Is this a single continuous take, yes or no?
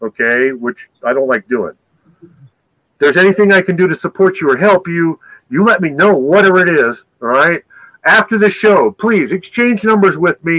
yes